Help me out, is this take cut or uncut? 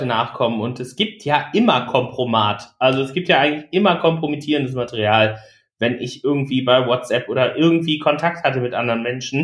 uncut